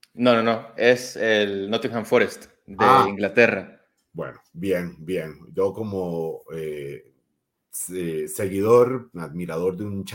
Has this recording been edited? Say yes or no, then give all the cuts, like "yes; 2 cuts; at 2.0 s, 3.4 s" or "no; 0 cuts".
no; 0 cuts